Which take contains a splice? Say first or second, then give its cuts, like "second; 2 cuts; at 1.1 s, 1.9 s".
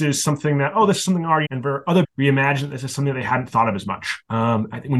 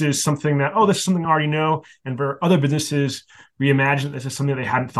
first; 2 cuts; at 1.4 s, 2.0 s